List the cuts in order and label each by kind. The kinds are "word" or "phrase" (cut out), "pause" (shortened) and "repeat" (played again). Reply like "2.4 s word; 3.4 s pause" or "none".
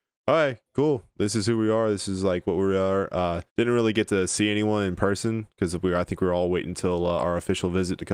3.5 s pause